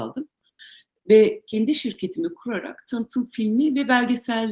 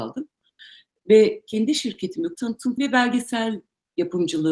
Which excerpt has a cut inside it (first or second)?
second